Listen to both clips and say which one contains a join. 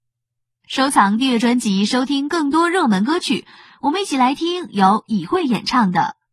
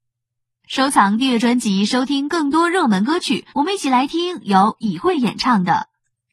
second; 1 cut; at 3.5 s

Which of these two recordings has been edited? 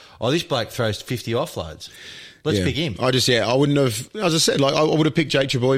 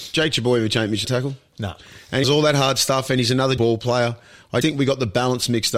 second; 4 cuts; at 1.0 s, 2.2 s, 3.6 s, 4.6 s

